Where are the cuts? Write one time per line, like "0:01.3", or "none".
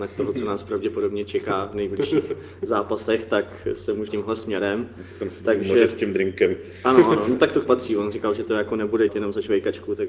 0:04.1
0:05.1
0:07.7
0:09.1